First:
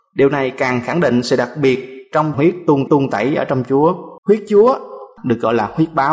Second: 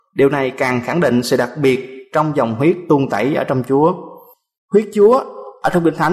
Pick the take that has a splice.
first; 4 cuts; at 2.3 s, 2.9 s, 4.2 s, 5.2 s

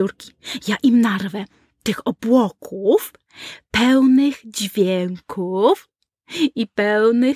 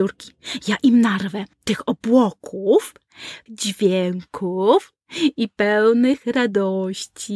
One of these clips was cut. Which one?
second; 3 cuts; at 1.5 s, 3.5 s, 5.0 s

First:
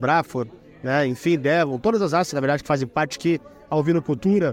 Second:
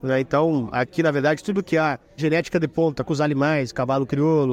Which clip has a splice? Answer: second; 2 cuts; at 2.2 s, 3.0 s

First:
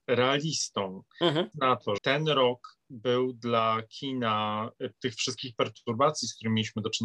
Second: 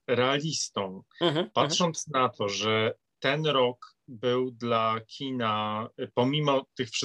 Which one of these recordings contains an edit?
first; 3 cuts; at 1.5 s, 2.0 s, 4.9 s

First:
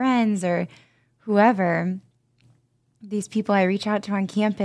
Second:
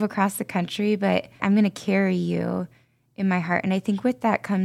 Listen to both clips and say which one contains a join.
second; 1 cut; at 1.4 s

